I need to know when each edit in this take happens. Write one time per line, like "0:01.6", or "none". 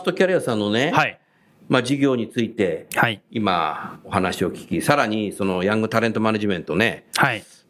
none

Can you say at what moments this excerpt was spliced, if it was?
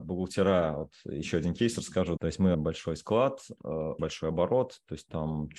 0:02.2
0:02.5
0:04.0

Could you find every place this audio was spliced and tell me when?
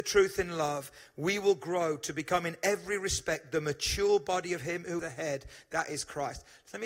0:05.0

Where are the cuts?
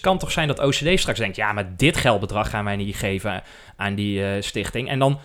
none

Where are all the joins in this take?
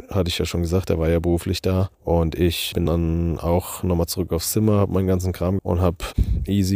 0:02.9
0:05.6

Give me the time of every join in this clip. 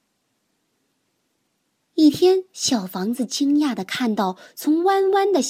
0:02.5

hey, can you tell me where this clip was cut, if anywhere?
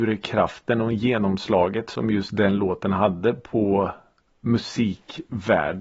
none

